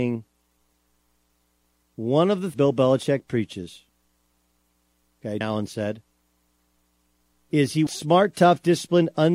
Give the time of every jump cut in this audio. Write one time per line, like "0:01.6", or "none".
0:02.5
0:05.4
0:07.9